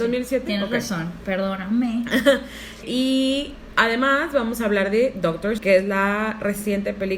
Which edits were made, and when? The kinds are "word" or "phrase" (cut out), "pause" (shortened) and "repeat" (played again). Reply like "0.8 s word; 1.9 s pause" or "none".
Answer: 2.8 s word; 5.6 s word